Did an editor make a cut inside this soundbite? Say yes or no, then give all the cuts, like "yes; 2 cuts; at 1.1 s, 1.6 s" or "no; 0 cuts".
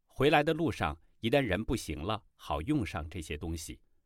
no; 0 cuts